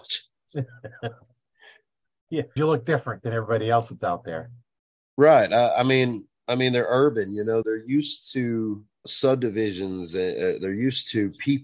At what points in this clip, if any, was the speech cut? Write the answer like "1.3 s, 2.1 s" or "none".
2.6 s, 7.6 s, 9.0 s